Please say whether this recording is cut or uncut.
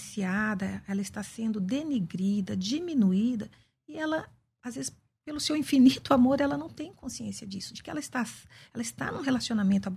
uncut